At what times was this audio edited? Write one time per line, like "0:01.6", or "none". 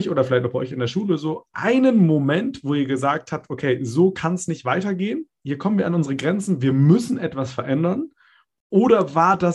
none